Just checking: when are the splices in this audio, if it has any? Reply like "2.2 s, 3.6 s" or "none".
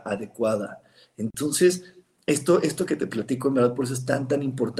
none